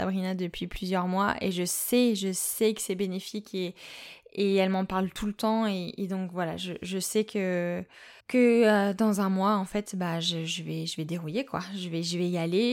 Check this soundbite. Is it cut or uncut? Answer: cut